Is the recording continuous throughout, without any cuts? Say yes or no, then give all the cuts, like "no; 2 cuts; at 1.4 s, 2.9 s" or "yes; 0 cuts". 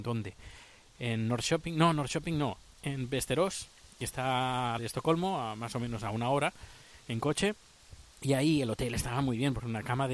no; 1 cut; at 4.8 s